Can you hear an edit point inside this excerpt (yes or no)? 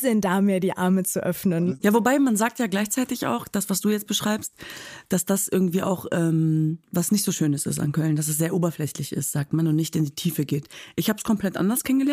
yes